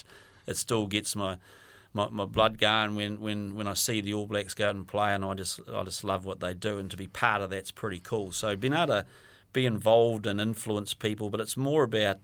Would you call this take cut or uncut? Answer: uncut